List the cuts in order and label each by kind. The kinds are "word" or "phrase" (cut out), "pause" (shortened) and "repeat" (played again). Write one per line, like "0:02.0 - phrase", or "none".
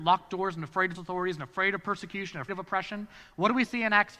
0:00.9 - word
0:02.5 - word